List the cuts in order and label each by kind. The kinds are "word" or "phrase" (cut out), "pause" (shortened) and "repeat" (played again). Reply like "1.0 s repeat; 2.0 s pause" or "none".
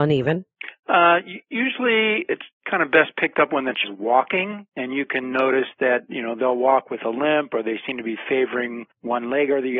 3.8 s word; 8.9 s pause

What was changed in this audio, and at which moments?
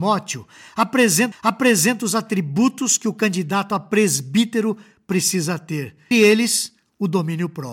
1.3 s repeat; 6.1 s word

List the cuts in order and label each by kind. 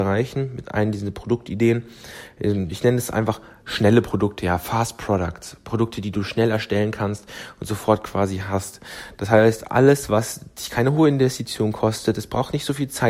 none

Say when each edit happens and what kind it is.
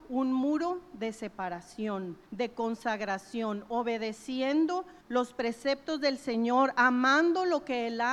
2.3 s pause; 5.0 s pause

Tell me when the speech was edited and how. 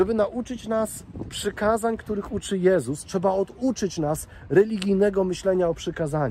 none

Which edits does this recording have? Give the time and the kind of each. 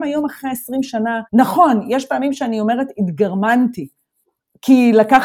1.3 s pause

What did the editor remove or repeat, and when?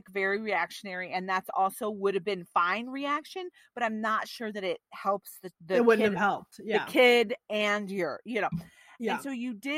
5.5 s pause

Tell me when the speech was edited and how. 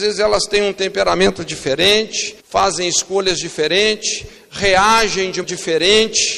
2.4 s pause; 5.4 s word

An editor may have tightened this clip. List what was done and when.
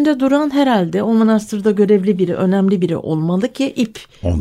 none

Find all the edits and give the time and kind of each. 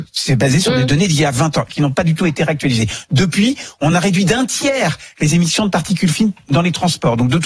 none

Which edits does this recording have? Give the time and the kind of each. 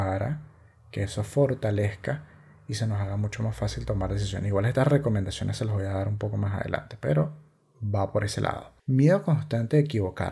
none

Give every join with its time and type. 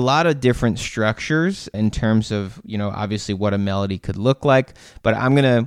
none

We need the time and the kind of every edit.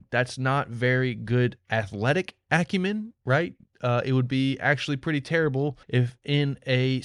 3.2 s pause; 5.8 s pause

